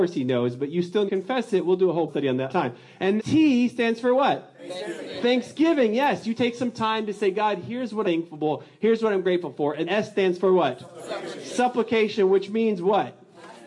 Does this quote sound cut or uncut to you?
cut